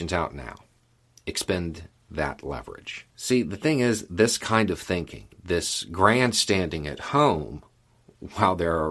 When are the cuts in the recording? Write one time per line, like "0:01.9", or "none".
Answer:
0:03.1
0:05.3

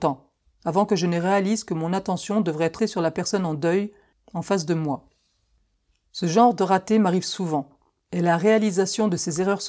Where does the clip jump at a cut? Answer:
0:02.8

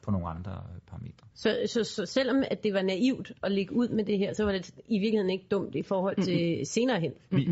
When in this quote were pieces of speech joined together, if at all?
0:01.3

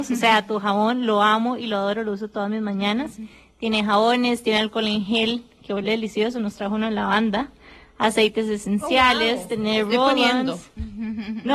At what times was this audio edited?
none

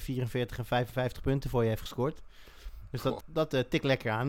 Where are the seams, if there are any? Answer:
0:03.2

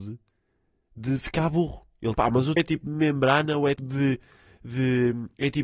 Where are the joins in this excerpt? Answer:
0:02.2
0:02.6
0:03.8

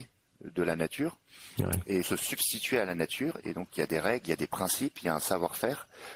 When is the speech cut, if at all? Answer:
0:02.0

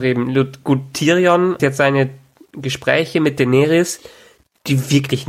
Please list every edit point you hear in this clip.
0:01.6

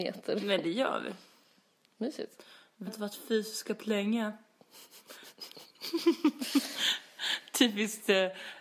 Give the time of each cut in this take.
0:02.9
0:03.8

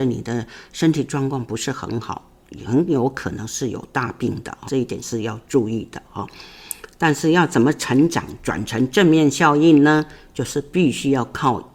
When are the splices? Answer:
0:04.7

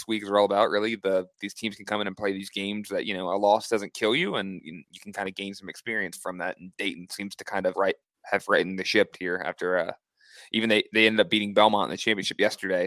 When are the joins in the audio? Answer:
0:07.7

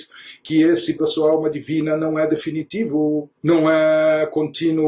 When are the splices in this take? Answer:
0:01.0
0:03.4

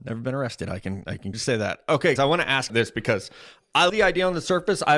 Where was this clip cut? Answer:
0:01.3
0:02.2
0:02.7
0:03.9

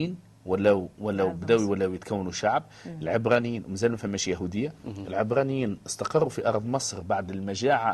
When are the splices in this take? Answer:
none

